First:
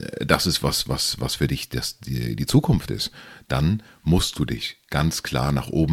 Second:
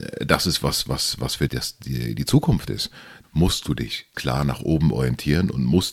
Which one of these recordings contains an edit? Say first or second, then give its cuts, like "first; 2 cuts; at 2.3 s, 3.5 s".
second; 3 cuts; at 1.5 s, 3.2 s, 4.1 s